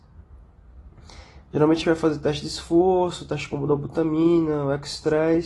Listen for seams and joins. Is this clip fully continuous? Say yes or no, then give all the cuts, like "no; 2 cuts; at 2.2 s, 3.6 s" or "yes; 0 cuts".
no; 1 cut; at 1.8 s